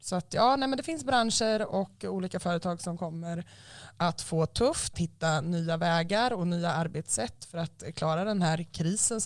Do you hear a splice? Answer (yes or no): yes